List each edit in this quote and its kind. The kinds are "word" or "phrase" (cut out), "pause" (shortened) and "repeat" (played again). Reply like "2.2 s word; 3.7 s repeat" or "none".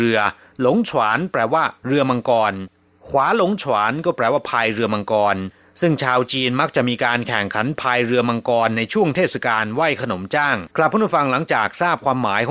10.7 s pause

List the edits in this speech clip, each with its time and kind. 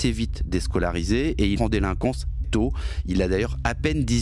1.6 s word; 2.4 s word

